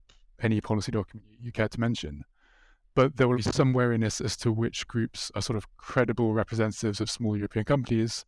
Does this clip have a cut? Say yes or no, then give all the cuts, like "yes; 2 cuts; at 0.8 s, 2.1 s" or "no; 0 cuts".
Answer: yes; 1 cut; at 3.3 s